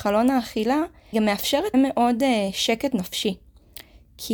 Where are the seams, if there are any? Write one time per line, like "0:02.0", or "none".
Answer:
0:01.1
0:01.7